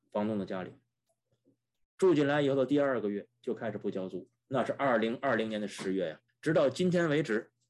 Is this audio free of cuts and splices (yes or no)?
no